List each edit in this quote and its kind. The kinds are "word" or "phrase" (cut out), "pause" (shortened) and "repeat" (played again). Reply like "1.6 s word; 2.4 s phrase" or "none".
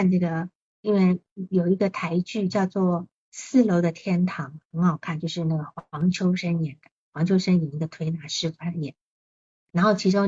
none